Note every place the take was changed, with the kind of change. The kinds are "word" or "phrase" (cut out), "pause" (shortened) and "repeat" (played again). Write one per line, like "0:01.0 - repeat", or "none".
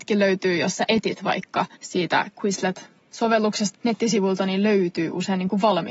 0:01.7 - pause
0:03.8 - phrase